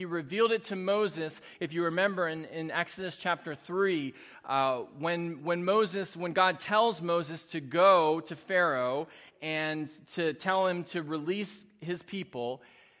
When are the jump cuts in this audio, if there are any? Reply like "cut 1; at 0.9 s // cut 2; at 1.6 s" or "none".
none